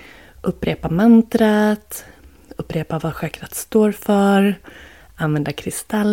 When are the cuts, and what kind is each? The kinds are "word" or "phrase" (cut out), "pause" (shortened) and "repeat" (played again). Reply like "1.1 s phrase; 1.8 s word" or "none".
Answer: none